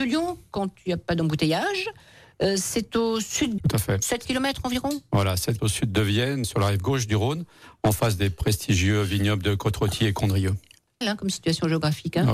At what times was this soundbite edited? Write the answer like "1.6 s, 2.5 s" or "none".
3.6 s, 5.6 s, 6.4 s, 11.0 s